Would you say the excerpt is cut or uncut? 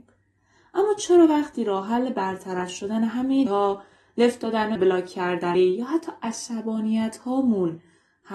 cut